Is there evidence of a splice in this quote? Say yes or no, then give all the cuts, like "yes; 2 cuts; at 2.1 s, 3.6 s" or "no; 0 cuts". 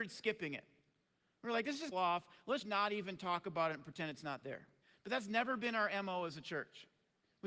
yes; 3 cuts; at 1.9 s, 2.6 s, 4.8 s